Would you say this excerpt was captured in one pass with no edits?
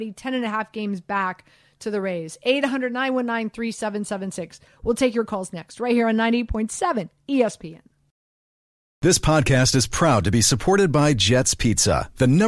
yes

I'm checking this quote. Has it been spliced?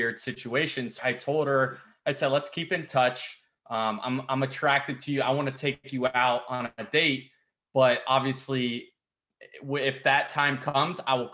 yes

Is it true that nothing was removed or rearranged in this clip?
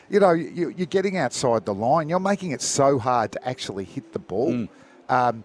yes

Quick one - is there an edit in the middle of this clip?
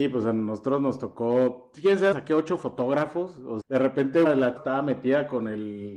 yes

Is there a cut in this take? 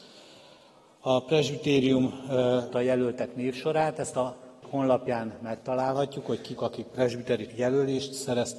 yes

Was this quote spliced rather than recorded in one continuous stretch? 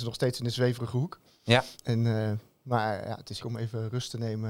yes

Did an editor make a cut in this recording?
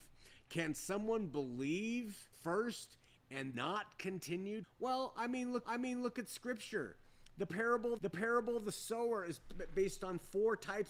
yes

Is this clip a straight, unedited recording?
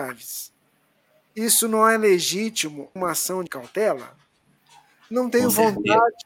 no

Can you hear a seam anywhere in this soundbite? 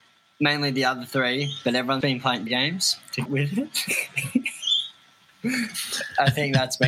yes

